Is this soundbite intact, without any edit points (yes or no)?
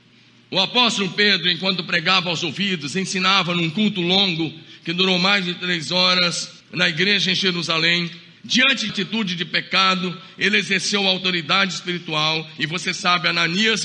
no